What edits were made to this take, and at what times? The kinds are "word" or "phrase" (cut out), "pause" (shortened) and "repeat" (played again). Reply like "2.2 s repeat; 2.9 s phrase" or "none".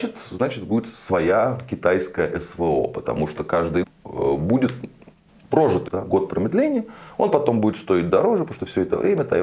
3.8 s word; 5.9 s word